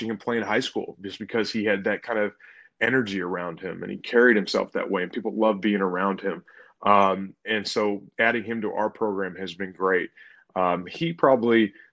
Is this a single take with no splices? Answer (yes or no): yes